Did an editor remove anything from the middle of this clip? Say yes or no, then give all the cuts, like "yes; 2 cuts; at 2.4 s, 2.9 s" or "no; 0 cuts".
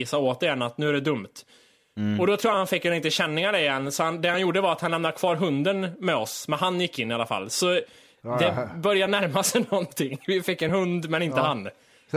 no; 0 cuts